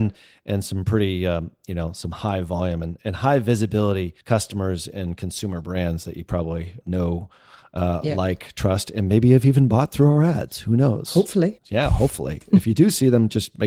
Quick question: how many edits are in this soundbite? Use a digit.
1